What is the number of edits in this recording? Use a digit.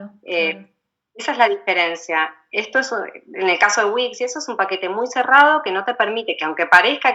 0